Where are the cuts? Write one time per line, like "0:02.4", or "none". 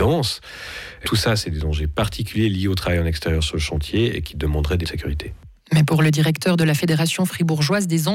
0:01.0
0:04.8